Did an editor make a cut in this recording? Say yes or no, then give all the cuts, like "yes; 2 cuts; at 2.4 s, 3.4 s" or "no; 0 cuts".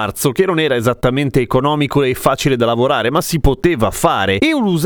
no; 0 cuts